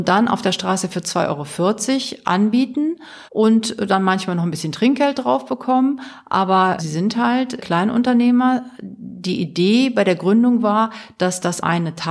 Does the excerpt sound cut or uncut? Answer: cut